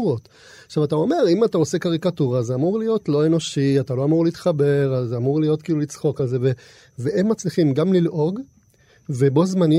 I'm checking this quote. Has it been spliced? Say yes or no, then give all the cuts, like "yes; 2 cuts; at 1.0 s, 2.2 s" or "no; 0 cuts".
no; 0 cuts